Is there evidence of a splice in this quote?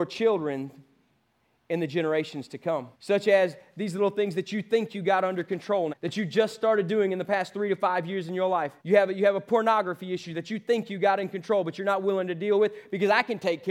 yes; 3 cuts; at 2.9 s, 5.9 s, 8.8 s

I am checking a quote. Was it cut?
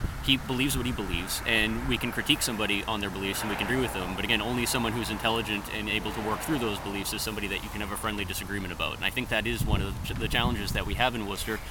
yes; 1 cut; at 3.7 s

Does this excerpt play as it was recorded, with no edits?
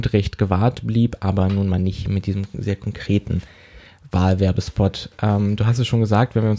yes; 0 cuts

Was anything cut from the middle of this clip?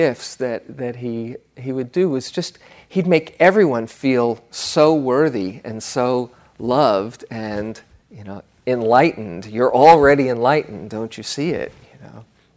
no; 0 cuts

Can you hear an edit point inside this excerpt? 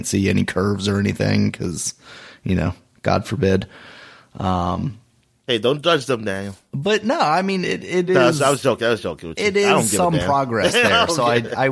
no; 0 cuts

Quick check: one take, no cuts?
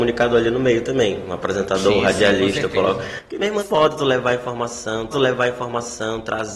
no; 2 cuts; at 3.6 s, 5.1 s

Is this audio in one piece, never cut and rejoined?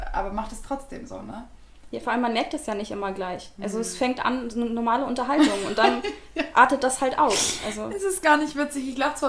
yes; 0 cuts

